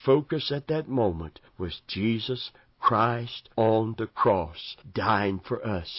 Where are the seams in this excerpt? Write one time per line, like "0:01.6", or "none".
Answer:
0:01.5
0:03.5
0:04.8